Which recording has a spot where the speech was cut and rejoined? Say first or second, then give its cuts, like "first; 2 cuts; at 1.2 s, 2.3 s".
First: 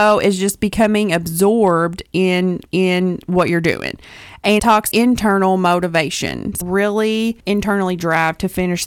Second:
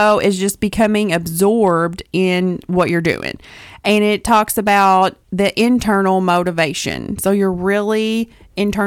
first; 5 cuts; at 2.7 s, 4.6 s, 4.9 s, 6.6 s, 7.4 s